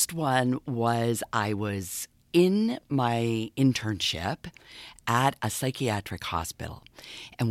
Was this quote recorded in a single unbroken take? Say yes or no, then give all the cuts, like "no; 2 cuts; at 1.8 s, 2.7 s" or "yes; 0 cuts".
yes; 0 cuts